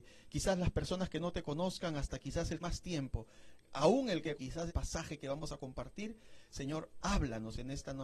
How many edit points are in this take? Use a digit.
3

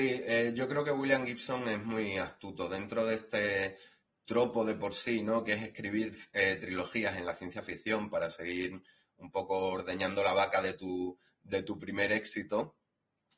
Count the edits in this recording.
0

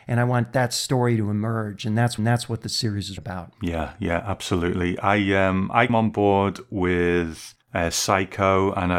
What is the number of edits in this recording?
4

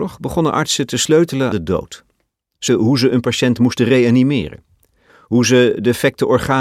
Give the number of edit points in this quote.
2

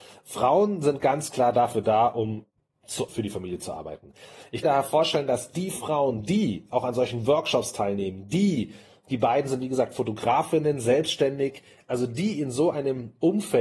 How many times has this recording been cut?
2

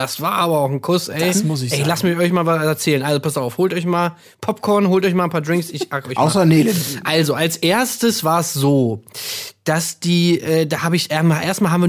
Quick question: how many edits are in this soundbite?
0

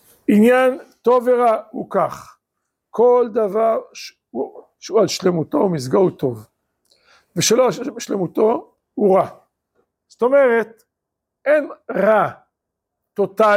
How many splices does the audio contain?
0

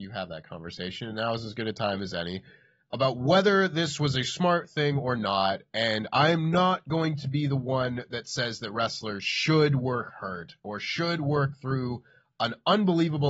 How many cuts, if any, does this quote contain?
0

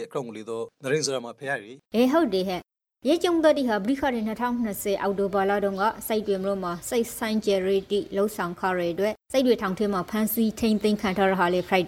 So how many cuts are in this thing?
2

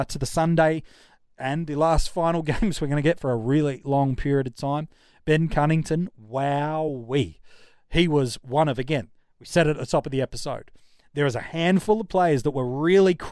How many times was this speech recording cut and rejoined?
0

